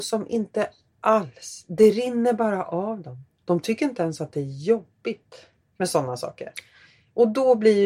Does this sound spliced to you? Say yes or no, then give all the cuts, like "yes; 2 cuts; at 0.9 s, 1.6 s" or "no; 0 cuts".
no; 0 cuts